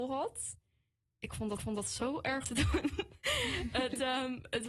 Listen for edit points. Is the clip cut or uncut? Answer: cut